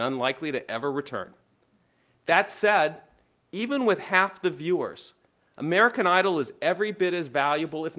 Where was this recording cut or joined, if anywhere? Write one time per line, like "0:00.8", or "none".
none